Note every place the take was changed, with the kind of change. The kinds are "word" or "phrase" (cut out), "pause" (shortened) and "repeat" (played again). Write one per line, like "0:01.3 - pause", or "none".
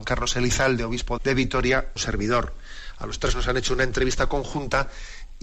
0:01.2 - word
0:02.0 - phrase